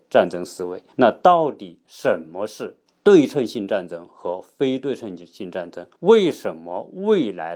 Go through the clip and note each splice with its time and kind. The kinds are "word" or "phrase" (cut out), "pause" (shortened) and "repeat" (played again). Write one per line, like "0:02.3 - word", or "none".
0:00.9 - pause
0:02.9 - pause
0:06.0 - pause